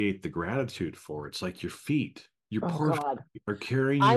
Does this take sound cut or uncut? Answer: uncut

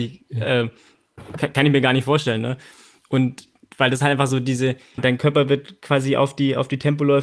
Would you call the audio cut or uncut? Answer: cut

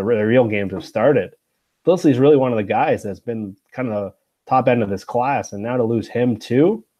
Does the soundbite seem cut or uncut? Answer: uncut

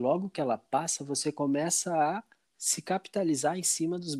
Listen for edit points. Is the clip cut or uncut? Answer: uncut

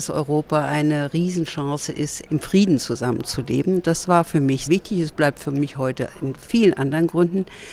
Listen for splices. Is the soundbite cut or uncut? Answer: cut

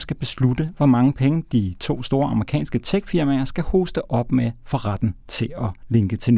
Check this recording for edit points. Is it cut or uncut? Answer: uncut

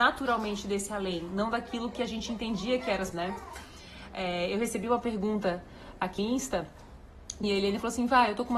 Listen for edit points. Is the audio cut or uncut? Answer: cut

